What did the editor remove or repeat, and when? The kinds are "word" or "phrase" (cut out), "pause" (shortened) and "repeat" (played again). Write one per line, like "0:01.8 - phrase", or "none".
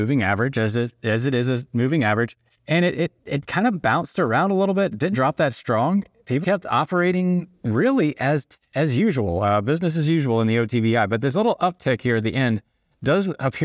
0:02.6 - pause
0:03.2 - pause
0:05.1 - word
0:06.4 - word